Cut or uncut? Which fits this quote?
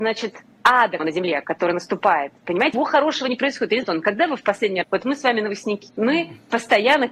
cut